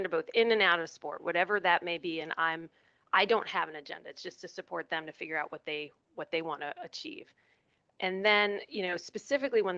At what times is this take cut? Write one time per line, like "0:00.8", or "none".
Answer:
none